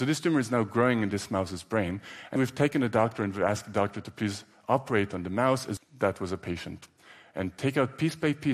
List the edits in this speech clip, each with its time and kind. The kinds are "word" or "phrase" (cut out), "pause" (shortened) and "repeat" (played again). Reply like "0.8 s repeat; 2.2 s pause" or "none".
2.4 s word; 5.8 s word